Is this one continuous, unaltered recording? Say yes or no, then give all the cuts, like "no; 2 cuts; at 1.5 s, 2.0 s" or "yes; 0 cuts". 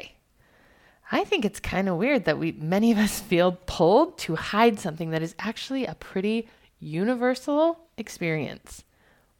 yes; 0 cuts